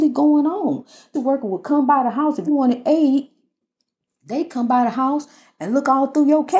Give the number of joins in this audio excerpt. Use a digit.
2